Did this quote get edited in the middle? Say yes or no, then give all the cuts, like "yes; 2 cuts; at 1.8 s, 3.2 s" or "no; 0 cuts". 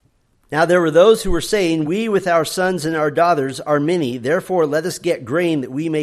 no; 0 cuts